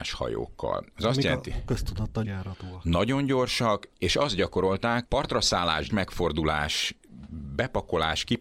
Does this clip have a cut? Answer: yes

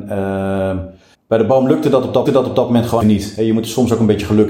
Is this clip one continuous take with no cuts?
no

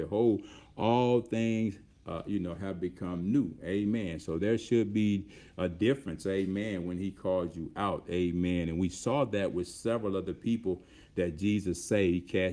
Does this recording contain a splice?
no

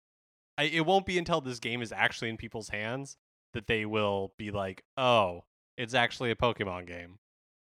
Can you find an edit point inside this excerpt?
no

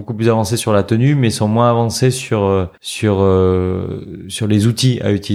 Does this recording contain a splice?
yes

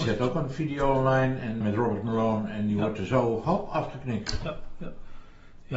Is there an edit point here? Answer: yes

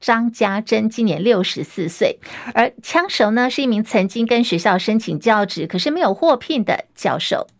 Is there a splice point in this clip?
no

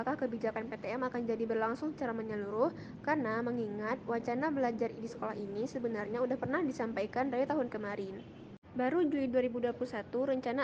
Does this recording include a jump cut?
no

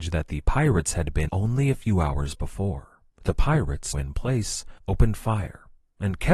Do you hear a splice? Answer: yes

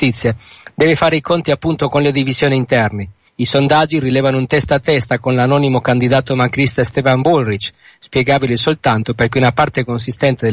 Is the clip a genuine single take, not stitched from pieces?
no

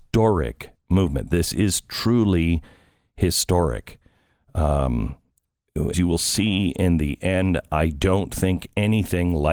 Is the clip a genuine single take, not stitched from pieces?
no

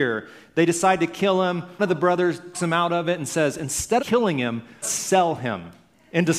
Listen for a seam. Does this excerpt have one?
yes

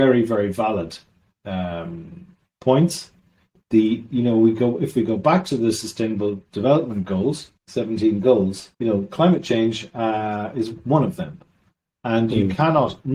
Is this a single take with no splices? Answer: no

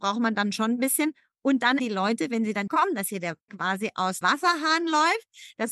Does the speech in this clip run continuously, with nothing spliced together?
no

